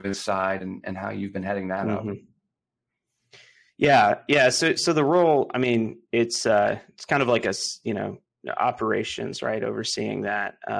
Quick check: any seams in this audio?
no; 0 cuts

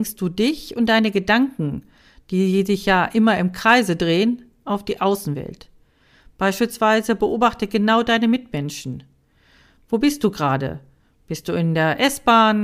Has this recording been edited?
no; 0 cuts

